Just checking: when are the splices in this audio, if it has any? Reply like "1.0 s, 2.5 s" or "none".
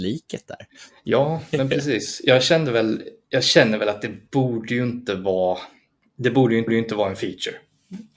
6.0 s, 6.7 s

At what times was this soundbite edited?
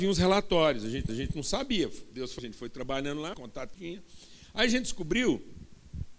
1.1 s, 2.4 s, 3.3 s, 3.7 s

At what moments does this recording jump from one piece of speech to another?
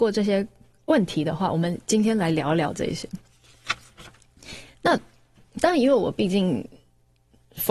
5.5 s

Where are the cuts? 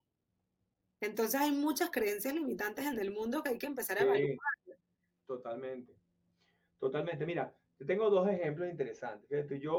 none

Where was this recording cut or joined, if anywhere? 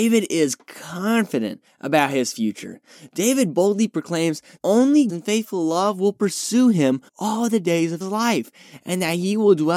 4.6 s, 5.1 s, 7.1 s, 8.0 s

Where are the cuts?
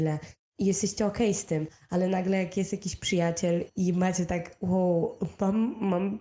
3.7 s

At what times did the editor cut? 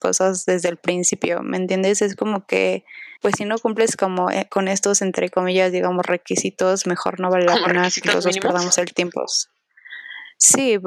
3.2 s

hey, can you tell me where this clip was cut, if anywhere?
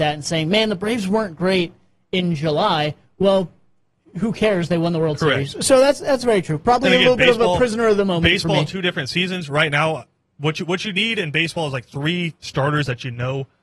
none

